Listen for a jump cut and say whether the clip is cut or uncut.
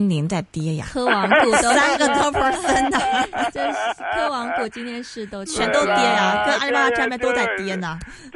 uncut